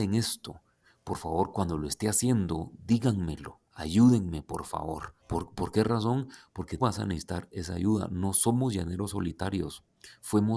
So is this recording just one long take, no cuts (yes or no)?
no